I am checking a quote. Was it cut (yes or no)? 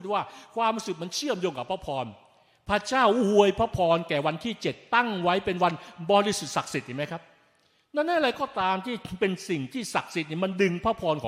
no